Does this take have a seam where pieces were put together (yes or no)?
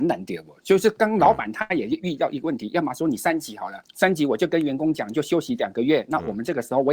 yes